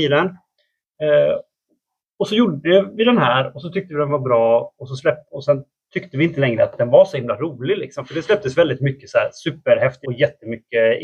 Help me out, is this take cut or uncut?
cut